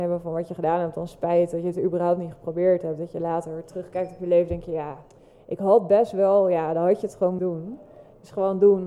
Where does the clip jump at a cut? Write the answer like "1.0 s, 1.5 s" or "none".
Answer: 7.4 s